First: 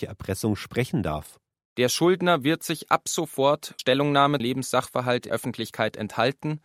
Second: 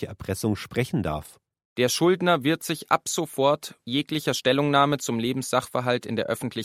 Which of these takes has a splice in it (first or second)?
first